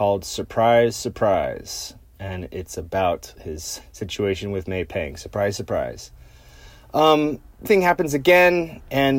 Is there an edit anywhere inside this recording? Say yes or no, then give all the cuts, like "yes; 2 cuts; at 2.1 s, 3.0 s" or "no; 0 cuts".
yes; 3 cuts; at 3.4 s, 3.8 s, 7.6 s